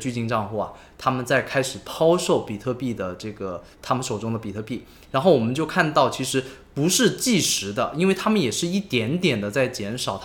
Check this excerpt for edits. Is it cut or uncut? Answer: cut